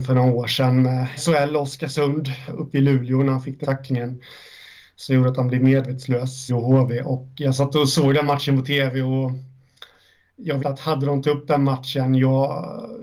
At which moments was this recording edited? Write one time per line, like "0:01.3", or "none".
0:01.2
0:02.5
0:03.6
0:06.5
0:10.6
0:11.2